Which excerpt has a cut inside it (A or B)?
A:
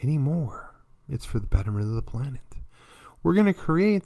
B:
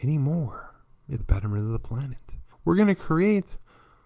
B